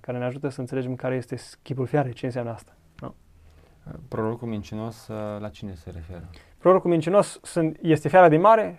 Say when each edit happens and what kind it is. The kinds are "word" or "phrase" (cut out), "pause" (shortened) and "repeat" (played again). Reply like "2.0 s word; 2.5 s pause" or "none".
none